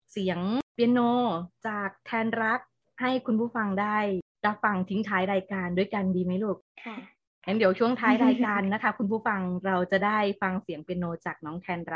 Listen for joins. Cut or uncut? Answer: uncut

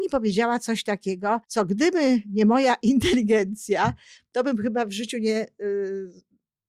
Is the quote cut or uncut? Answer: cut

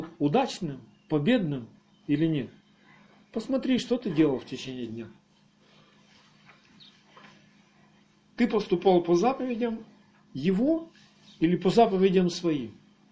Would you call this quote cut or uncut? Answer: uncut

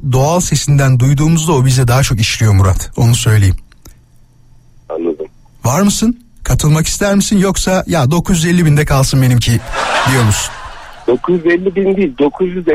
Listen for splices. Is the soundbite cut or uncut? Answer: uncut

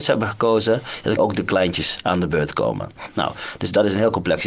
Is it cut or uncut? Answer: cut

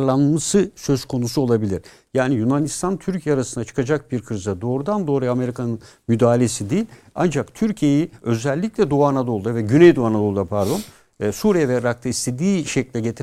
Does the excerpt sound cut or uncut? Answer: uncut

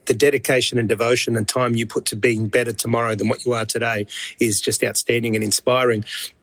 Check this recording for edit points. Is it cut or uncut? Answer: uncut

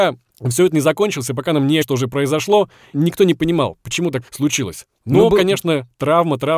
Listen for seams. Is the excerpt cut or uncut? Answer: cut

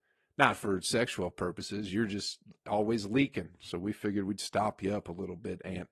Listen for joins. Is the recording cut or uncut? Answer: uncut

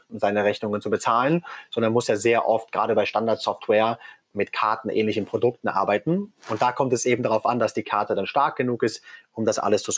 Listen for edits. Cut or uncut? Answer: uncut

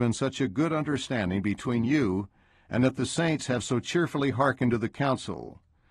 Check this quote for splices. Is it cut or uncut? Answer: uncut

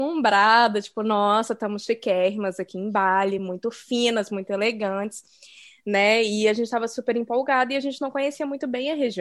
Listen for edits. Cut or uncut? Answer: uncut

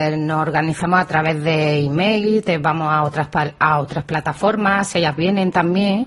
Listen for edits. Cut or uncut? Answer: uncut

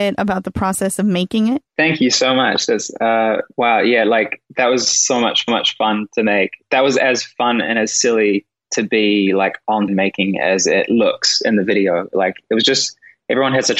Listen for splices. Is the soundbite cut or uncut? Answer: cut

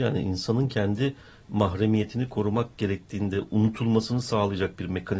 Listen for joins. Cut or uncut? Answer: uncut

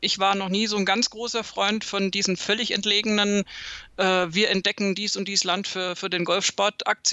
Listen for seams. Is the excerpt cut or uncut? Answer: uncut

